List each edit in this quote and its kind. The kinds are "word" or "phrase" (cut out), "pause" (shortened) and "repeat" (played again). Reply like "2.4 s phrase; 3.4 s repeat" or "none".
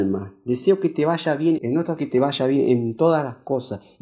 1.6 s word; 2.0 s phrase